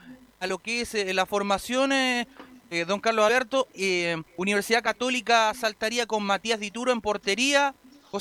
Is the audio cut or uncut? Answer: cut